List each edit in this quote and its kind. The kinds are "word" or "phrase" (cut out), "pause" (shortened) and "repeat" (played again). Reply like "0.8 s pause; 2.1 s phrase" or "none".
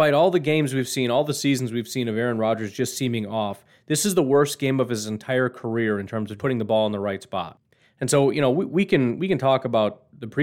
6.4 s word